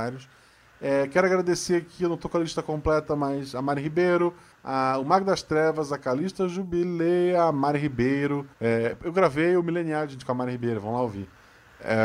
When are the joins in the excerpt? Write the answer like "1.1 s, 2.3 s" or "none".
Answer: 4.5 s, 8.5 s